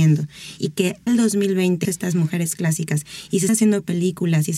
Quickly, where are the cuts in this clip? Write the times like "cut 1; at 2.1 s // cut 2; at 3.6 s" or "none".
cut 1; at 1.1 s // cut 2; at 1.8 s // cut 3; at 3.5 s